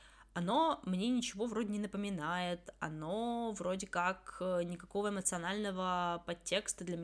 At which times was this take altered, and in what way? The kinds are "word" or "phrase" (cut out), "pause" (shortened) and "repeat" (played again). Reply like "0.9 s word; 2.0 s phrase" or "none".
none